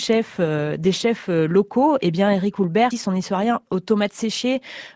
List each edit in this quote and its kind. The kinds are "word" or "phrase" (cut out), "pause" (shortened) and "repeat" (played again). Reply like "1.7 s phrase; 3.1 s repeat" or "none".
2.9 s phrase